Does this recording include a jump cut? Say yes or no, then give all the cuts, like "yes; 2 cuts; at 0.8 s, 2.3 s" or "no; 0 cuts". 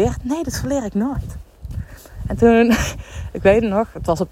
no; 0 cuts